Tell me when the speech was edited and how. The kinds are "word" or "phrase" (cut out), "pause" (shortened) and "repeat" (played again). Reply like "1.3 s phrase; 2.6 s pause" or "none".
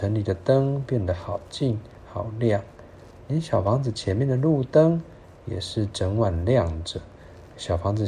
none